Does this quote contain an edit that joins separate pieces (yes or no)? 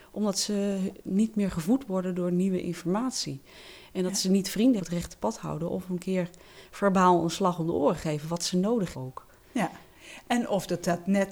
yes